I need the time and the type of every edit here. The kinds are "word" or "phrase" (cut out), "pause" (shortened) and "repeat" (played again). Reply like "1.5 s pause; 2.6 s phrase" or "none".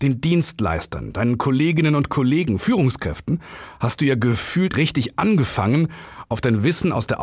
4.7 s word